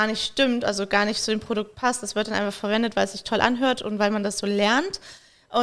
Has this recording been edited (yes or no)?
no